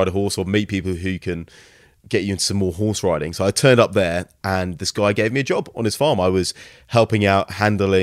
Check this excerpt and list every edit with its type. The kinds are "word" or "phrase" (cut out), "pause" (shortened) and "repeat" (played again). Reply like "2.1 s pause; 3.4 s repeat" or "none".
none

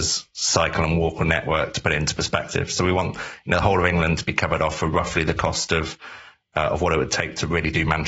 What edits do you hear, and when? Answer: none

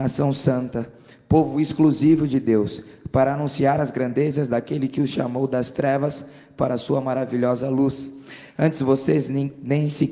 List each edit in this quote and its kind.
none

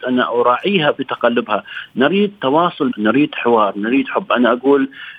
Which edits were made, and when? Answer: 2.9 s word

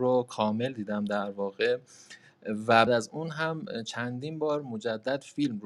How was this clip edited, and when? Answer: 2.9 s word

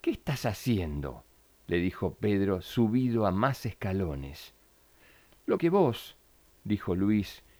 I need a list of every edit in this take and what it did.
5.6 s word

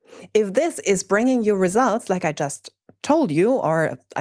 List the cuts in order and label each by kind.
none

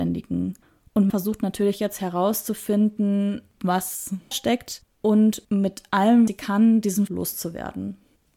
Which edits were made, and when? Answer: 1.1 s word; 4.3 s word; 5.4 s word; 6.3 s word; 7.1 s word

